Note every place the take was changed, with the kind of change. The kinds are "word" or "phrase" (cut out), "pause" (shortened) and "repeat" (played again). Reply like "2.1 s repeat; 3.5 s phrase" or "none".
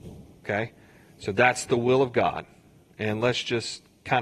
none